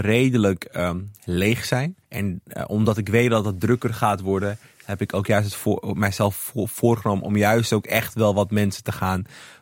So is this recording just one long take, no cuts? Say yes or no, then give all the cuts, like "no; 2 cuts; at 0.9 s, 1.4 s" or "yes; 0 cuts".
no; 1 cut; at 2.0 s